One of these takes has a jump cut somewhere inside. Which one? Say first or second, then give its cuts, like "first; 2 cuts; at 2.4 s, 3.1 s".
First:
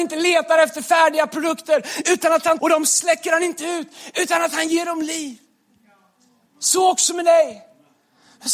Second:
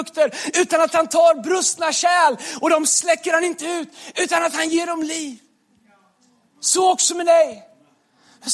first; 1 cut; at 2.6 s